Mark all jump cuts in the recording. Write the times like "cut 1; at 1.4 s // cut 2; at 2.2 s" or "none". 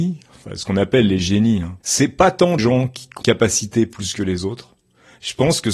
cut 1; at 1.8 s // cut 2; at 2.6 s // cut 3; at 3.2 s